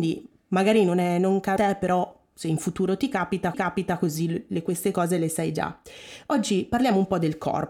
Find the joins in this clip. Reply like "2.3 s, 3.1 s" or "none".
1.6 s, 3.5 s